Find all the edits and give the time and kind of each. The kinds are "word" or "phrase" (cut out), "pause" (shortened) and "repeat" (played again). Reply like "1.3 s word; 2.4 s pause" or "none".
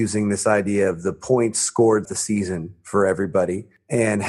2.0 s word